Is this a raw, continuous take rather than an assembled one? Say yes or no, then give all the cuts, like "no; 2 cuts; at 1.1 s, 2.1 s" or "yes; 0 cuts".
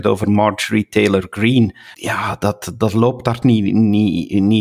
no; 2 cuts; at 1.9 s, 3.4 s